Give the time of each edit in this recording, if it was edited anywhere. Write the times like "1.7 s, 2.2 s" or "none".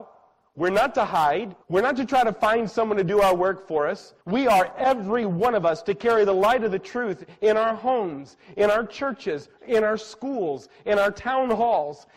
1.6 s, 4.2 s

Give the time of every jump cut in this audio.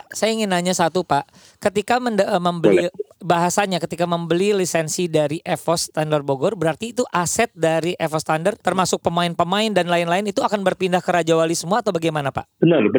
8.6 s

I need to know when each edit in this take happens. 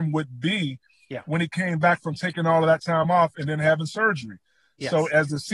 none

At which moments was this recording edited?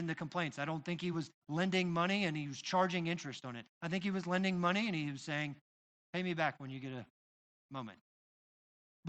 none

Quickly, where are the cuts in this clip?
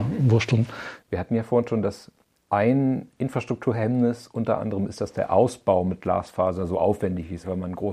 none

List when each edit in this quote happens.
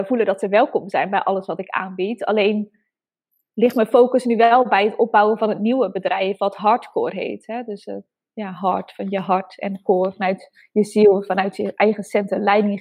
none

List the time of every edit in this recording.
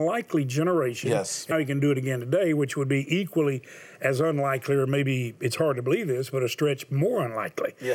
1.5 s

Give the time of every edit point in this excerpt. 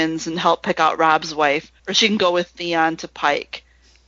1.8 s

